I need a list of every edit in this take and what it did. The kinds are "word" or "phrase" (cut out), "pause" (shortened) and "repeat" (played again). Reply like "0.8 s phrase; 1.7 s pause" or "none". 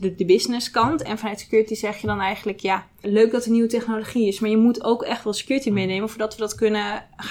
3.0 s word